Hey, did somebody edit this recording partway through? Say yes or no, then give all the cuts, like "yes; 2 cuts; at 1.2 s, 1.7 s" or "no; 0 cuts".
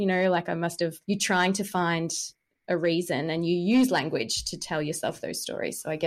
yes; 1 cut; at 1.0 s